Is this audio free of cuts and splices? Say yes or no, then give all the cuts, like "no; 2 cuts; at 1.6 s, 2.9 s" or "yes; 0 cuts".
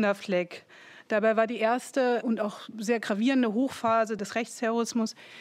yes; 0 cuts